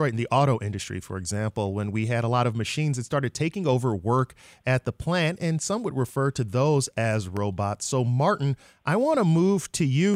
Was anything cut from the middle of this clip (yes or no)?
no